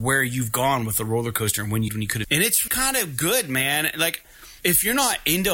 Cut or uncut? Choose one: cut